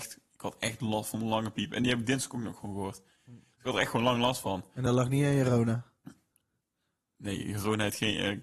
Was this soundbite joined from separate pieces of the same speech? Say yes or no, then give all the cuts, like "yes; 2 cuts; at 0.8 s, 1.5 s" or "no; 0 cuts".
no; 0 cuts